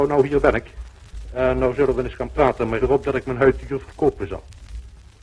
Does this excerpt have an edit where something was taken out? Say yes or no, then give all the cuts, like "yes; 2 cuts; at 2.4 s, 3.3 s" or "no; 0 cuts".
yes; 1 cut; at 2.8 s